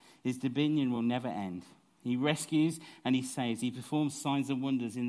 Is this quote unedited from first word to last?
yes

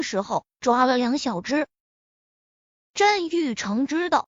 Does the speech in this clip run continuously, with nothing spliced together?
yes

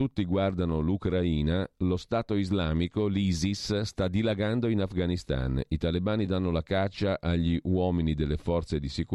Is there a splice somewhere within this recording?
no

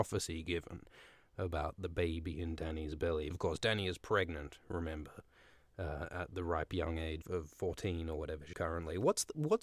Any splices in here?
yes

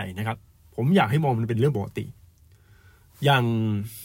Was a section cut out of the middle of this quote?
no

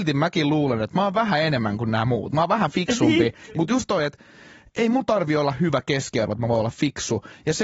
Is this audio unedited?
yes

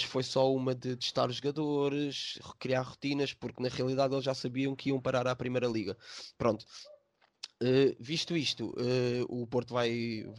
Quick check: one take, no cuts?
yes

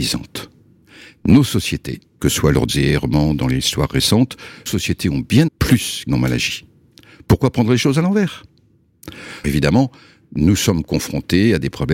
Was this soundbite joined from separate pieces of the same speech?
yes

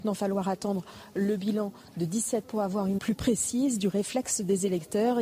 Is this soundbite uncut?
no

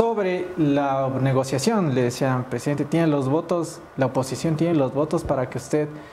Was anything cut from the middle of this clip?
no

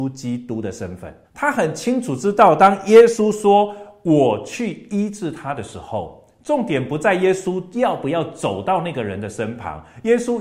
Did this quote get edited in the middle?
yes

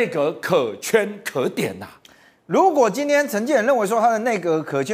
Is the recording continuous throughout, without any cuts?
yes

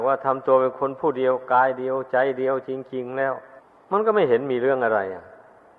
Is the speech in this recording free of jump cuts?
no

